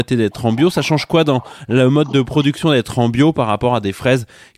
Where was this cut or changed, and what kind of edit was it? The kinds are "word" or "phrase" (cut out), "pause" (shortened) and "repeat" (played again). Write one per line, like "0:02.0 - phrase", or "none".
none